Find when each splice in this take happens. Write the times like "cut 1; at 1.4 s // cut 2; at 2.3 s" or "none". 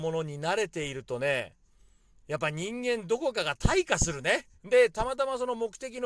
cut 1; at 4.6 s